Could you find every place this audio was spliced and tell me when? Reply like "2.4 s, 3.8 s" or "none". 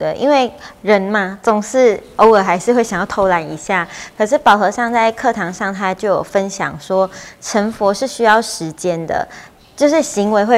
none